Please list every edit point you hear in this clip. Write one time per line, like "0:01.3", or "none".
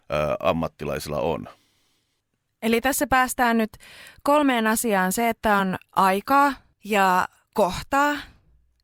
none